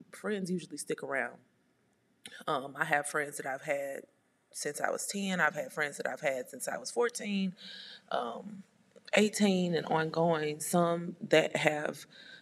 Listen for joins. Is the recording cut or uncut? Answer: uncut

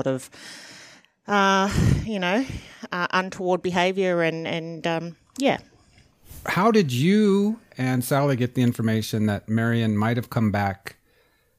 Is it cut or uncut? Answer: uncut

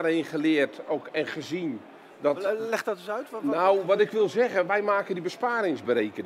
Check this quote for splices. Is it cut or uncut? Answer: uncut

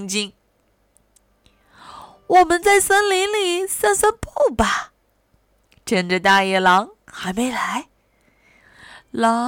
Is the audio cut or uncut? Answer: uncut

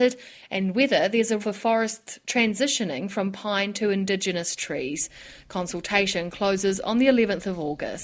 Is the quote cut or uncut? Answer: cut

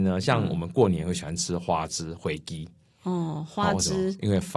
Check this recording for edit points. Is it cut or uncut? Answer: uncut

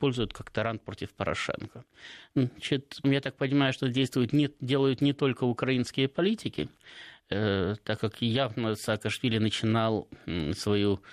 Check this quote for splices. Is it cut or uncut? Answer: cut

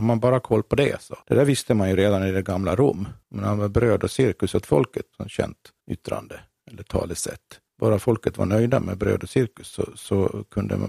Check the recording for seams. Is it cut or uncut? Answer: cut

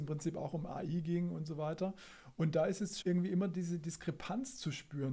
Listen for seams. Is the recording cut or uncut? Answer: cut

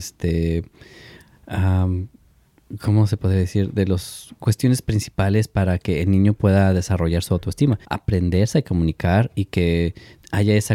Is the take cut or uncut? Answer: cut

